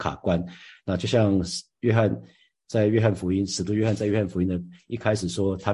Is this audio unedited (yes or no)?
yes